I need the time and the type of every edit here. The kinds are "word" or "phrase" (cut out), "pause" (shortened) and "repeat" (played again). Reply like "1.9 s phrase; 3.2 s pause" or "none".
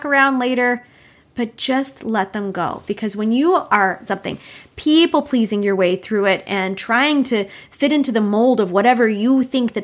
4.1 s phrase